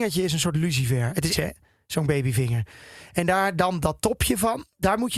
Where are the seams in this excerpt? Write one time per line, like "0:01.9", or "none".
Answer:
0:01.3